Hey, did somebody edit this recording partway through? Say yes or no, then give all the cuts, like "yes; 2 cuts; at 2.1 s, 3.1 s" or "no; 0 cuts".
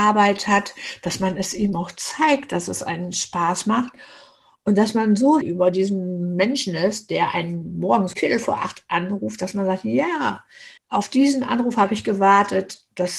yes; 3 cuts; at 5.4 s, 8.1 s, 10.8 s